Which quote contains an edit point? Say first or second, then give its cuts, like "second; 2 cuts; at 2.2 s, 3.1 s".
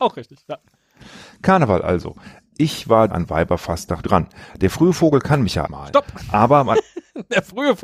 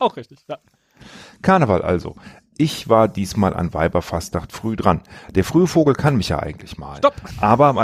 first; 3 cuts; at 3.1 s, 4.0 s, 5.7 s